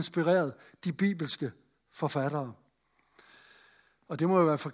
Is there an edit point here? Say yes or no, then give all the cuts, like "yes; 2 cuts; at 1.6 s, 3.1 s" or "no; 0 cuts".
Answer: no; 0 cuts